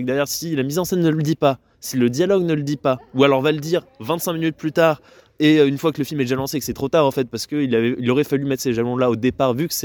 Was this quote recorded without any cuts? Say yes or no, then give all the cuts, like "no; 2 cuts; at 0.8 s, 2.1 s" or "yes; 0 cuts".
yes; 0 cuts